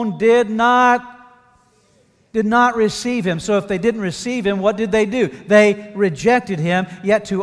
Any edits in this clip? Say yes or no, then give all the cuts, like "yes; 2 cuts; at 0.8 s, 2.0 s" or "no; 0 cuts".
no; 0 cuts